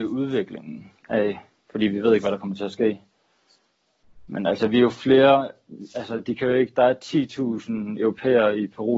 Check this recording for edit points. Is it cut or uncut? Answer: cut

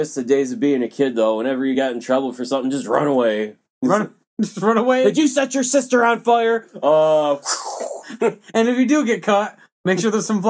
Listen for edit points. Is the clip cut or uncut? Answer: uncut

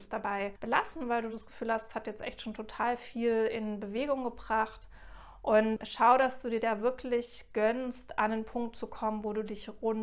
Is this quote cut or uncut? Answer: uncut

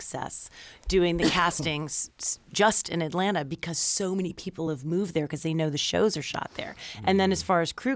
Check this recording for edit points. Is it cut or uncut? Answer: uncut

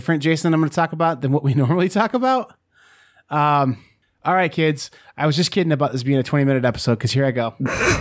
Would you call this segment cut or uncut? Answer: uncut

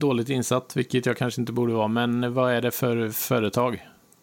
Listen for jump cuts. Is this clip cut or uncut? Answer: uncut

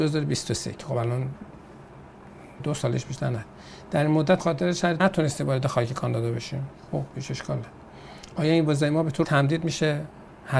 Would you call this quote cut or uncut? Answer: cut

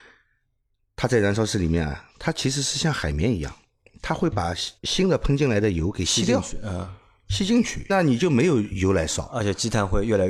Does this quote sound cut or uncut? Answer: cut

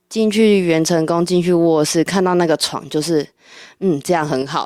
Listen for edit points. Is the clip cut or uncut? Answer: uncut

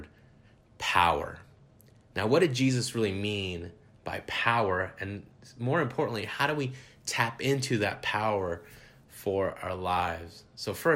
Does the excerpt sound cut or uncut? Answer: uncut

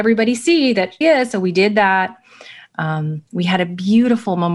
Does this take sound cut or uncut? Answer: cut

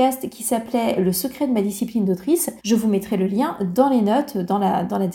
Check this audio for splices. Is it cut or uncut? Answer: cut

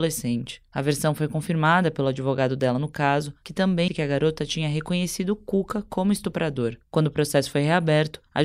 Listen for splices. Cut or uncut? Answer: cut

